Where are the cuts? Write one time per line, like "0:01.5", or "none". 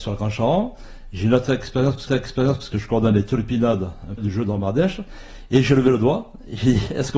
0:02.1
0:04.2